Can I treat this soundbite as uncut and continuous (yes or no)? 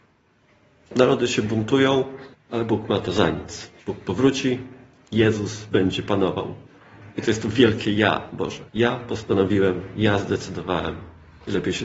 no